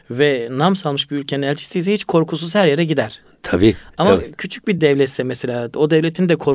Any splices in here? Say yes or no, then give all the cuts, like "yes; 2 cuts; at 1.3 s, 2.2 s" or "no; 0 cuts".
no; 0 cuts